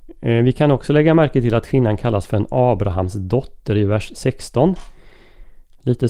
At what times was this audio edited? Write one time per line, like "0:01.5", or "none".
none